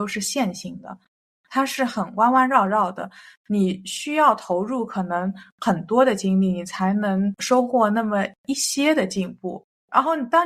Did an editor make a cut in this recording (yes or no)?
no